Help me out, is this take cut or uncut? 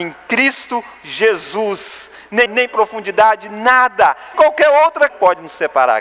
cut